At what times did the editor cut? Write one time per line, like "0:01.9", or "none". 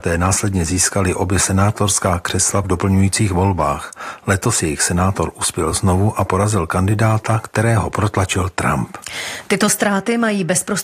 none